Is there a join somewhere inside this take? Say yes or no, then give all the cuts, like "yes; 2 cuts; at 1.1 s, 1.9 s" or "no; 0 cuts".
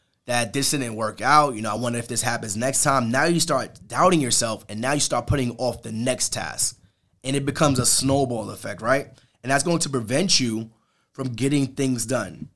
no; 0 cuts